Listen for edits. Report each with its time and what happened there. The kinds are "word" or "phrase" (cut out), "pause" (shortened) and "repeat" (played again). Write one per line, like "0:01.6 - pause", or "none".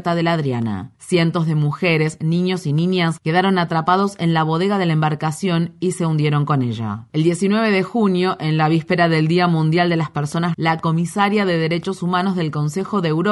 0:10.5 - word